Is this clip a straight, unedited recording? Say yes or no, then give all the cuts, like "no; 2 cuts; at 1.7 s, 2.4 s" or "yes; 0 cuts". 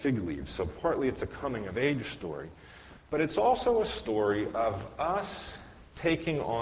yes; 0 cuts